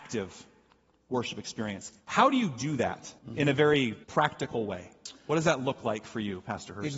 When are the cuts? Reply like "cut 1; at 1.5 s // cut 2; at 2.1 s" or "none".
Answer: cut 1; at 2.0 s // cut 2; at 3.2 s // cut 3; at 4.0 s